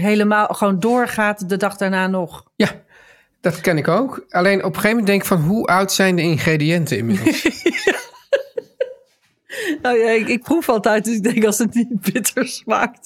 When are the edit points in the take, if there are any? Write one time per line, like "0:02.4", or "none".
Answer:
none